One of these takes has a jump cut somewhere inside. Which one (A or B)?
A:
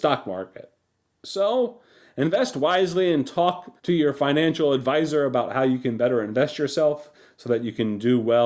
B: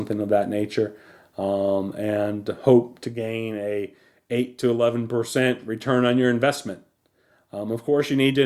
A